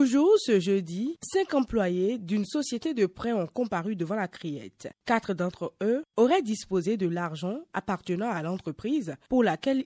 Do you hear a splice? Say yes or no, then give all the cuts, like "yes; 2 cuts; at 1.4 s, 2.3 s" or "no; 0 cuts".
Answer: yes; 1 cut; at 4.9 s